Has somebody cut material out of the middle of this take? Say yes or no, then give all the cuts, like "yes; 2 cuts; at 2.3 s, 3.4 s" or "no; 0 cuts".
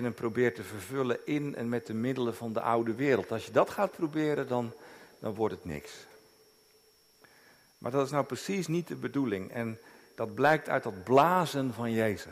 no; 0 cuts